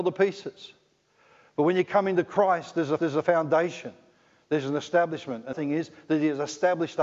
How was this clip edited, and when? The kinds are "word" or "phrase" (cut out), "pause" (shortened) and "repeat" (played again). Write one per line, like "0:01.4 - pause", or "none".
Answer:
0:03.0 - repeat
0:05.5 - phrase

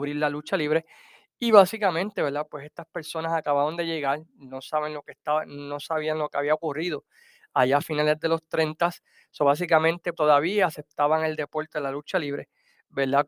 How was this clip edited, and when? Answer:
0:10.1 - word

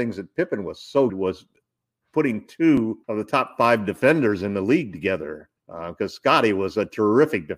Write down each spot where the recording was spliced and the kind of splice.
0:01.1 - word
0:03.0 - pause
0:05.6 - pause

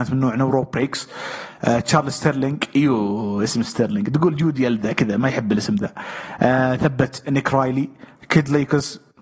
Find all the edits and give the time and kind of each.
none

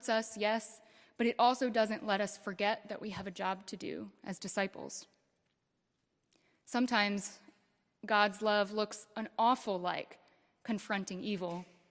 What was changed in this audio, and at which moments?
none

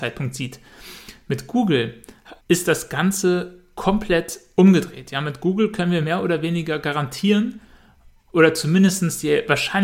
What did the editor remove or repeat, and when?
0:02.4 - pause

